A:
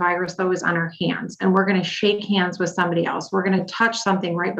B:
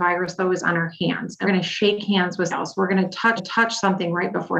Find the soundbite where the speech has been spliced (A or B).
B